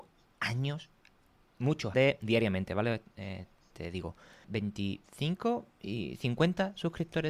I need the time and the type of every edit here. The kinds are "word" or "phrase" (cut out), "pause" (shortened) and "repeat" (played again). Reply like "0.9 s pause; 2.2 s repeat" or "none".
1.9 s phrase; 4.4 s word